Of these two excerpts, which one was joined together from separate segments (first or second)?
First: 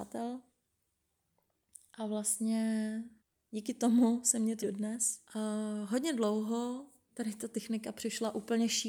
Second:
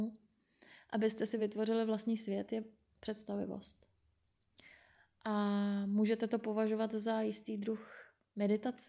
first